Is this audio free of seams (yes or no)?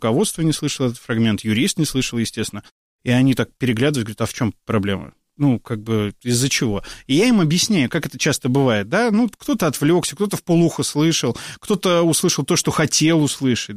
yes